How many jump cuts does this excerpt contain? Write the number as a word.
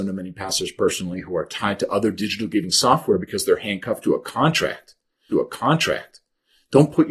one